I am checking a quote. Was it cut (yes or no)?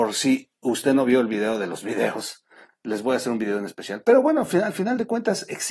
no